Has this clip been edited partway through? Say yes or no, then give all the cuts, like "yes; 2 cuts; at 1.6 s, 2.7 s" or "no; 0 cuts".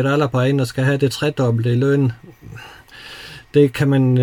no; 0 cuts